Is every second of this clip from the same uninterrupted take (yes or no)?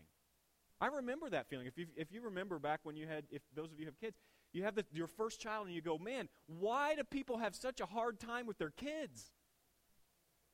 yes